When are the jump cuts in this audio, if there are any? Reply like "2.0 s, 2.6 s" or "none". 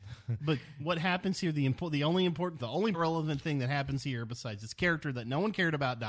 2.6 s, 2.9 s